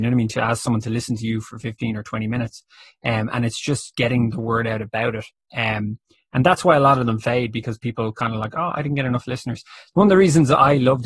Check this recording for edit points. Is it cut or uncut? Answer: uncut